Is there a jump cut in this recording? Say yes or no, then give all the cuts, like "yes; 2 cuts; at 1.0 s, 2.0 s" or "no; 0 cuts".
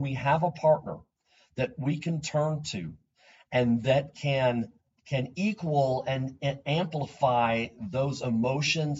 no; 0 cuts